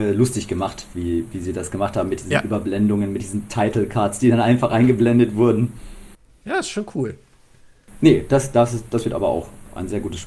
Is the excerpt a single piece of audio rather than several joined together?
yes; 0 cuts

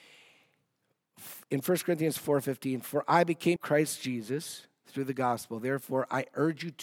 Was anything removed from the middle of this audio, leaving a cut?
yes; 2 cuts; at 1.4 s, 3.6 s

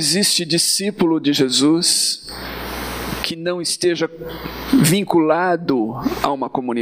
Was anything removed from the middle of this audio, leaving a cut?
no; 0 cuts

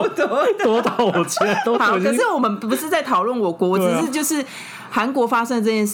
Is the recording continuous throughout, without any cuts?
no; 1 cut; at 1.8 s

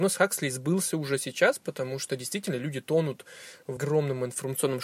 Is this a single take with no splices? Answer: no; 1 cut; at 3.8 s

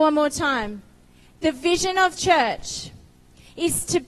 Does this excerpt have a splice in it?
yes; 1 cut; at 2.2 s

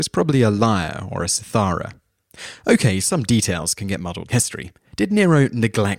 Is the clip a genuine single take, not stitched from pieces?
no; 2 cuts; at 3.0 s, 4.3 s

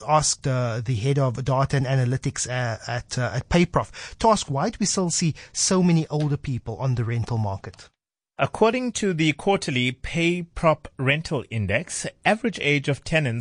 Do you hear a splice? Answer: no; 0 cuts

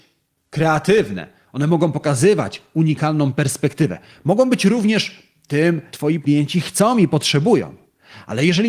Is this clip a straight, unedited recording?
no; 2 cuts; at 5.9 s, 6.2 s

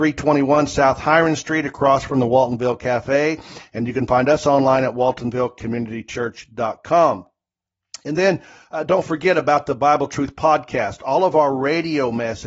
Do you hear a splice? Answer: no; 0 cuts

